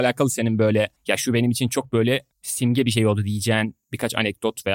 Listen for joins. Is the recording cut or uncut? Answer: cut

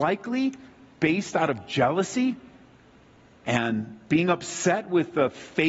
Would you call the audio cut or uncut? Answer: uncut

